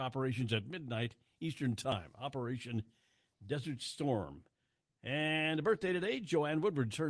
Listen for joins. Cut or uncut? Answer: uncut